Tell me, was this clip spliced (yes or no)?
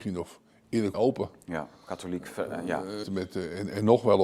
yes